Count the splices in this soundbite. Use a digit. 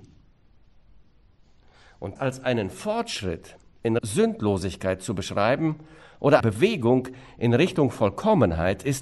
3